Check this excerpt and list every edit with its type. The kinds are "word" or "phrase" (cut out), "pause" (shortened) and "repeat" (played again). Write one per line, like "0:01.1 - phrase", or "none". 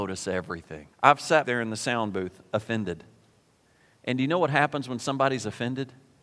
0:00.9 - pause
0:01.4 - word